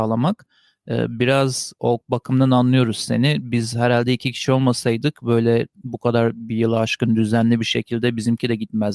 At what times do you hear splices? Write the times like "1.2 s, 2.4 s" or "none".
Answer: 1.8 s